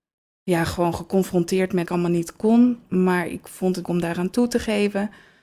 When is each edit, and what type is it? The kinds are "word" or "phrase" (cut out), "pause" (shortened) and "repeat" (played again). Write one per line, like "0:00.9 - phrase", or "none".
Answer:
0:01.9 - phrase
0:03.8 - word